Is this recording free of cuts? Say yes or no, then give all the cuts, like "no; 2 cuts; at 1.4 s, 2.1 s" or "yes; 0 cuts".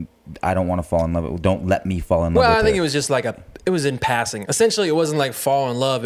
yes; 0 cuts